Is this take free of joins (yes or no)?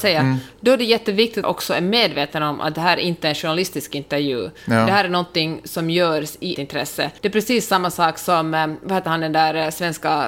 no